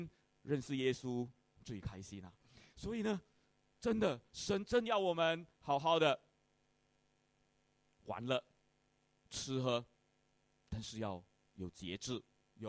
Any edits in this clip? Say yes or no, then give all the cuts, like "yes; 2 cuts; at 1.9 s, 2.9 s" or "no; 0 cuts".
no; 0 cuts